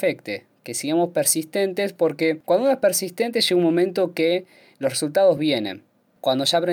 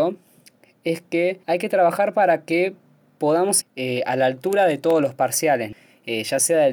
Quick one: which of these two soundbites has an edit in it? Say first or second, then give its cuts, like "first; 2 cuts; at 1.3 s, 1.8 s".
second; 2 cuts; at 1.4 s, 3.6 s